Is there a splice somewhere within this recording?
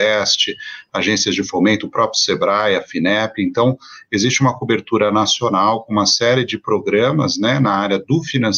no; 0 cuts

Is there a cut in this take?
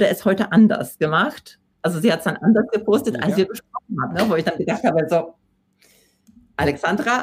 no; 0 cuts

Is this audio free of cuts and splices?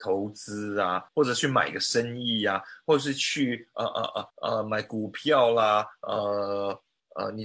no; 2 cuts; at 1.1 s, 4.3 s

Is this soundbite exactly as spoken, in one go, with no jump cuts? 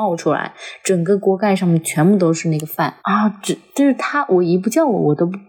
no; 1 cut; at 3.0 s

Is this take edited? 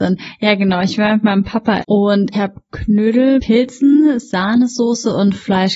yes; 3 cuts; at 1.8 s, 2.3 s, 3.4 s

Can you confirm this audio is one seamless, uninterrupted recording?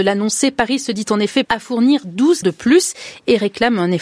no; 2 cuts; at 1.4 s, 2.4 s

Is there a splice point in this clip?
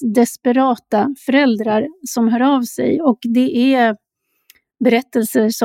no; 0 cuts

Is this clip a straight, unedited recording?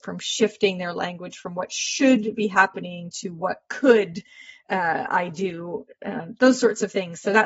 yes; 0 cuts

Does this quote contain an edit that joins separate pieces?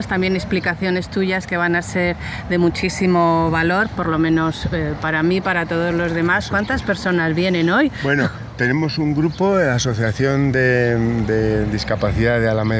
no; 0 cuts

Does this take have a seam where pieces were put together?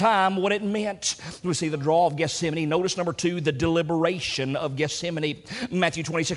no; 0 cuts

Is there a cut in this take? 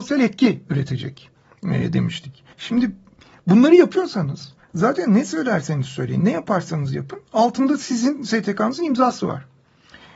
yes; 2 cuts; at 2.5 s, 4.6 s

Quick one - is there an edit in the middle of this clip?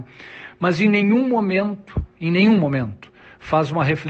no; 0 cuts

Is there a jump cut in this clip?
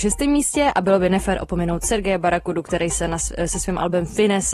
no; 0 cuts

